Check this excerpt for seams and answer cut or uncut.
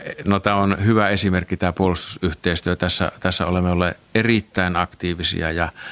uncut